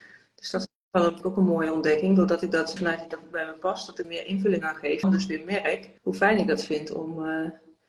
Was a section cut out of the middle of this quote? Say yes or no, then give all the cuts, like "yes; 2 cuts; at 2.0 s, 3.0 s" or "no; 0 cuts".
yes; 6 cuts; at 1.2 s, 2.8 s, 3.1 s, 4.0 s, 5.0 s, 6.0 s